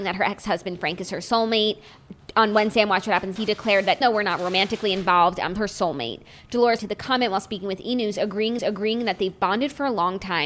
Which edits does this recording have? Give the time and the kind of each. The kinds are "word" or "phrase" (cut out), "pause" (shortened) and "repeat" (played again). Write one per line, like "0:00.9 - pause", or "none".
0:03.4 - word
0:04.0 - word
0:05.6 - word
0:06.8 - word
0:08.6 - repeat